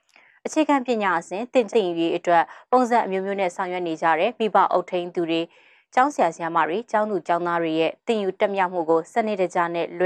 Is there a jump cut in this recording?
yes; 1 cut; at 1.7 s

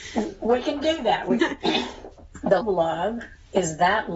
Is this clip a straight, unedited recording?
no; 2 cuts; at 1.4 s, 2.6 s

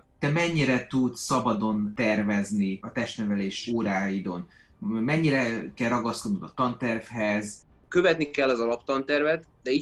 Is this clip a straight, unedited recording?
yes; 0 cuts

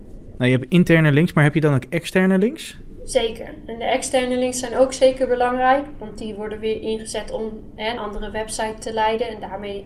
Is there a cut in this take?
yes; 1 cut; at 8.0 s

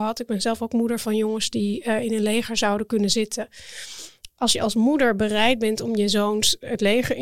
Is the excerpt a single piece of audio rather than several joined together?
yes; 0 cuts

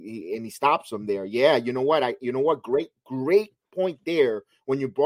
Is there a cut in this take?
no; 0 cuts

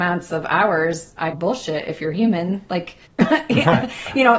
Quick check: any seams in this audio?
yes; 2 cuts; at 1.3 s, 3.1 s

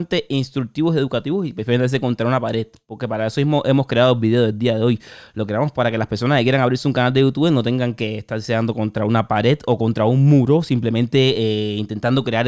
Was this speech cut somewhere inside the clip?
no; 0 cuts

